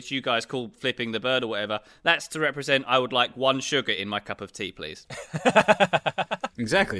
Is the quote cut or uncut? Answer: uncut